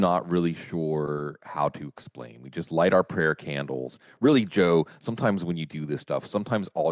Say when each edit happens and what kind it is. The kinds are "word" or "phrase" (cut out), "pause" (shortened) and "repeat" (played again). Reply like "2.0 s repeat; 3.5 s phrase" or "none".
none